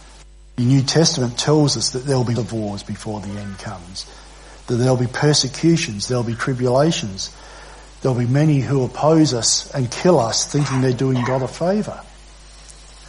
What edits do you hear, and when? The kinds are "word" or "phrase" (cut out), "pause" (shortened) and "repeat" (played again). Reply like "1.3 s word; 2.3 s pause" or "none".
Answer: 2.4 s phrase